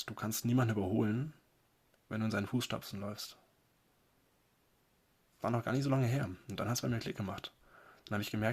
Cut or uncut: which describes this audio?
cut